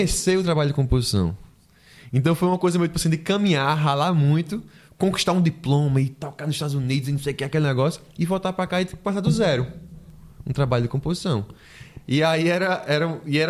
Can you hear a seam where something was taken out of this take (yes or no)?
no